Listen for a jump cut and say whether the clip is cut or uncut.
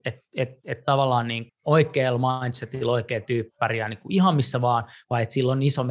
cut